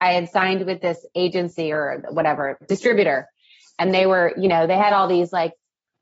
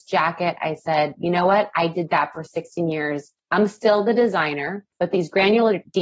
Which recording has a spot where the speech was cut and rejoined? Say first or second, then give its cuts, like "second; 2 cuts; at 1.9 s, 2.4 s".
second; 2 cuts; at 3.4 s, 4.9 s